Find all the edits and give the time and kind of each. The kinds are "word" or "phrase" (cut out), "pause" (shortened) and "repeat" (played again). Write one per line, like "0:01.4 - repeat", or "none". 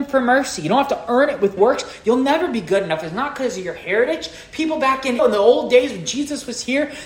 0:01.6 - word
0:05.2 - word